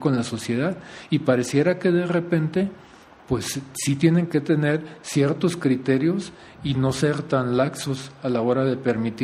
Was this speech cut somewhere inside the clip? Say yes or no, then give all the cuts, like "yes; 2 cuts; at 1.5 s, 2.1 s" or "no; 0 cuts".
no; 0 cuts